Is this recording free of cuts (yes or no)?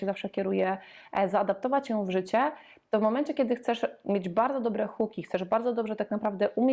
yes